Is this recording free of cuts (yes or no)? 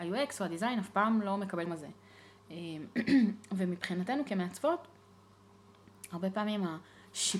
no